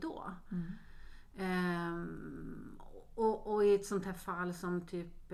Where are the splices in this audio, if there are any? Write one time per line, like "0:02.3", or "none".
none